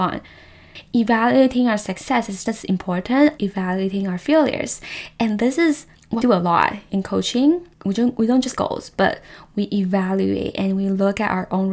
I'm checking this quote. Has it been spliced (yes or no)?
yes